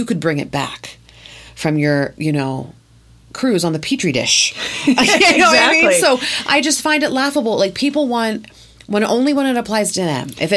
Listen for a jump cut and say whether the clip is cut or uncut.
uncut